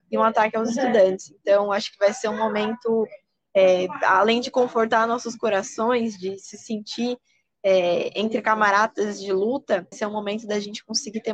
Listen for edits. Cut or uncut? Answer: cut